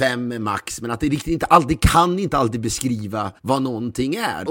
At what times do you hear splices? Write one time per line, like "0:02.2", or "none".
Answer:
0:03.4